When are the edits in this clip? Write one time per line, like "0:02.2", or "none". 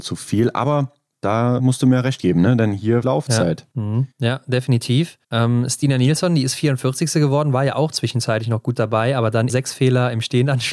0:01.1
0:01.6
0:03.0
0:03.7
0:04.1
0:05.2
0:09.5